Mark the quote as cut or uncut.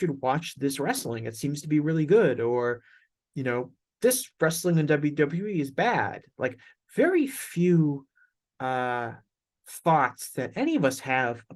uncut